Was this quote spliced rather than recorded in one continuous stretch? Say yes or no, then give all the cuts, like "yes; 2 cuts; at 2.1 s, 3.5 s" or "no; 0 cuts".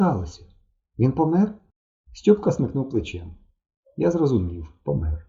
no; 0 cuts